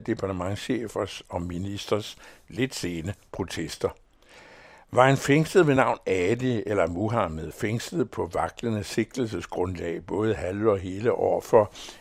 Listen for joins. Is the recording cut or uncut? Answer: uncut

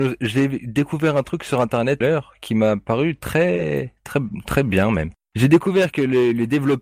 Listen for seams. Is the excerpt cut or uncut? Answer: cut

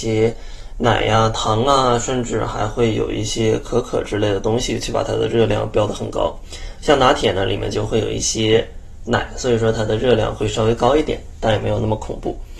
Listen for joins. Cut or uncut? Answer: uncut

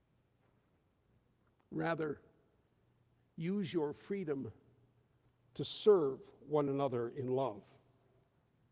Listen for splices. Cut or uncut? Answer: uncut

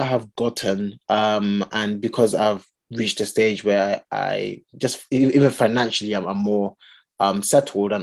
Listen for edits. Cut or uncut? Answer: uncut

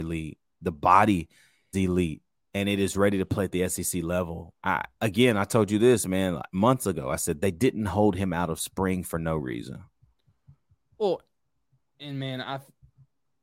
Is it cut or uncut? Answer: cut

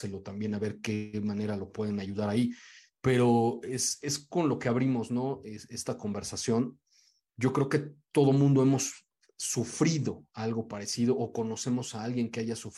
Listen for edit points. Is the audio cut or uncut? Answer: uncut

